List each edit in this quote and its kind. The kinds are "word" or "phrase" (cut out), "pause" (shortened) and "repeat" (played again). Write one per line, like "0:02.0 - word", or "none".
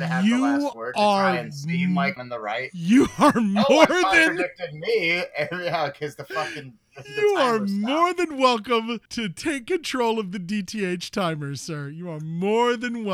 0:02.2 - phrase
0:09.1 - pause